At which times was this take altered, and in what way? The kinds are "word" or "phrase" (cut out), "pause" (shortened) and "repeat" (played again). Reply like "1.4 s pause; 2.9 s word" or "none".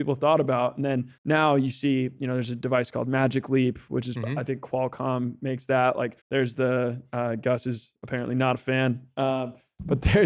1.2 s pause; 6.2 s pause